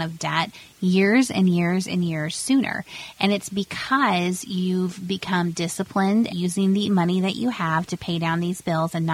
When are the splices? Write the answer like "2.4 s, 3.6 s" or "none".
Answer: 6.3 s